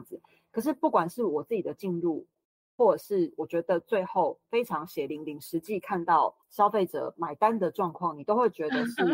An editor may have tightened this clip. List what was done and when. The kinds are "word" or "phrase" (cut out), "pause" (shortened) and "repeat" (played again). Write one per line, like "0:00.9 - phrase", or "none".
0:06.4 - pause